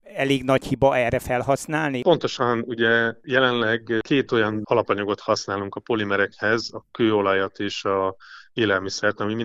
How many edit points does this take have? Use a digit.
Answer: 0